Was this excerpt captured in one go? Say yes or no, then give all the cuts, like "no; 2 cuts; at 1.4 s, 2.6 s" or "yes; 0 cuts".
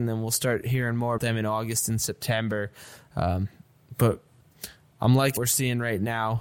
no; 2 cuts; at 1.2 s, 5.4 s